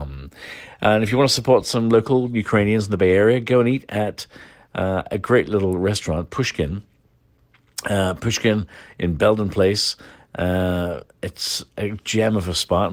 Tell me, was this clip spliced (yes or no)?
no